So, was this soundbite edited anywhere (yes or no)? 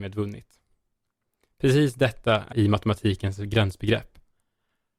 yes